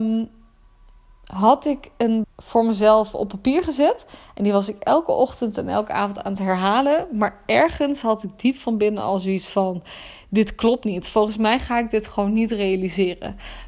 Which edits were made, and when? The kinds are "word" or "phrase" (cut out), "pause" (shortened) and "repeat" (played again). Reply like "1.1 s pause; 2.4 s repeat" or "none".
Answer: 2.2 s phrase

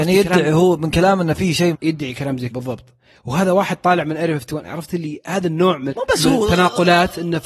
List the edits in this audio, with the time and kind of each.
1.7 s word; 2.5 s word; 5.9 s word

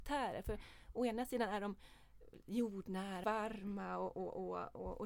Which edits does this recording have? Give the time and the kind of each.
3.2 s word

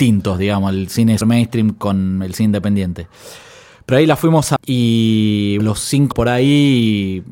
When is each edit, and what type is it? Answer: 1.2 s word; 4.6 s word; 5.6 s word; 6.1 s word

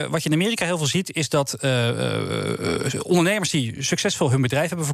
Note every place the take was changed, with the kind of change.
none

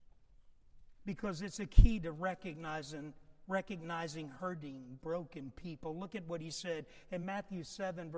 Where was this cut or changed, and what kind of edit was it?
none

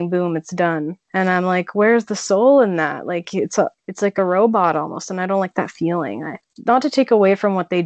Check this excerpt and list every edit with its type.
none

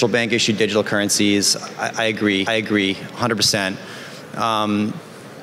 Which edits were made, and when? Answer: 2.5 s repeat

